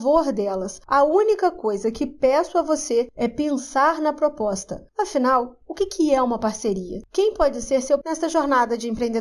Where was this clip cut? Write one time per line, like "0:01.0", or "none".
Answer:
0:08.0